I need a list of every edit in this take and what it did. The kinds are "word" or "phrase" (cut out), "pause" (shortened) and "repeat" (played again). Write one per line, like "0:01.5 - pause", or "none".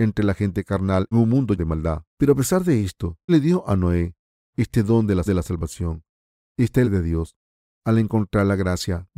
0:01.1 - word
0:01.6 - word
0:02.1 - pause
0:03.3 - word
0:05.3 - repeat
0:06.8 - phrase